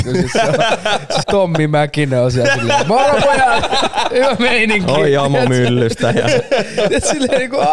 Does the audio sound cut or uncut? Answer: cut